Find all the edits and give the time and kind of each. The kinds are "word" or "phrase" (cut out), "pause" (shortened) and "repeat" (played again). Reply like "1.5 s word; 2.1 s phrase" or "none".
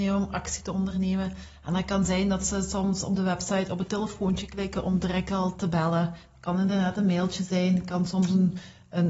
none